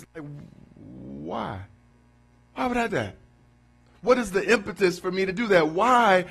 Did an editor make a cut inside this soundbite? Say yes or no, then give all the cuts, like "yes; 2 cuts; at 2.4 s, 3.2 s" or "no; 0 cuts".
yes; 2 cuts; at 1.9 s, 2.9 s